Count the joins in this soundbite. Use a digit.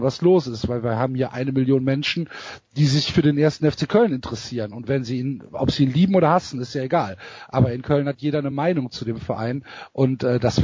0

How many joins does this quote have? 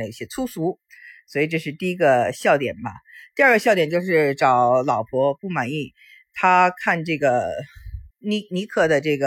1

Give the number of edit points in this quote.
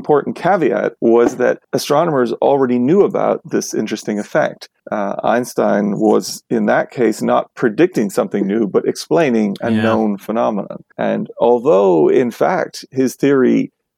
4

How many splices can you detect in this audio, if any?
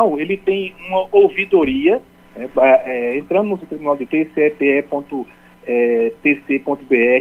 3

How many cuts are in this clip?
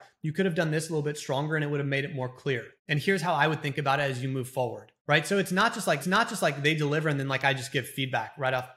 3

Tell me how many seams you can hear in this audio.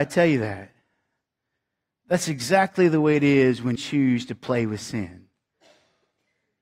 1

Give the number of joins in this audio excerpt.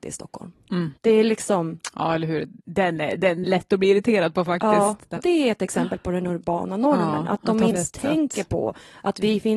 5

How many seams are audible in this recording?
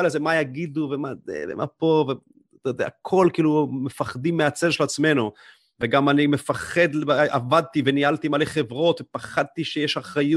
0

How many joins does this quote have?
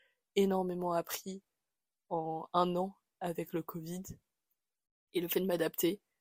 0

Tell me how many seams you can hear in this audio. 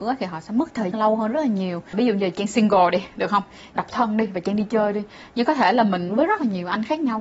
3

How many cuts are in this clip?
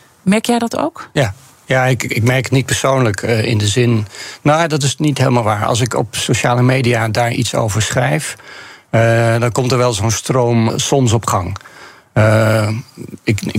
1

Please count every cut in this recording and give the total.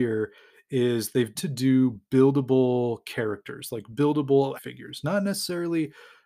2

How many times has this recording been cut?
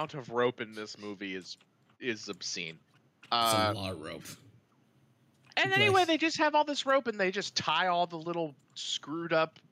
0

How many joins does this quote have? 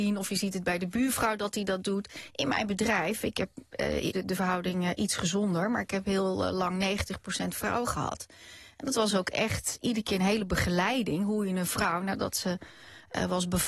1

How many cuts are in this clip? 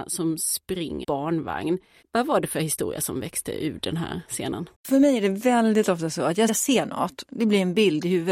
4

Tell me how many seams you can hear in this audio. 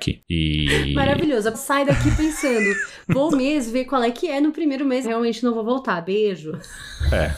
3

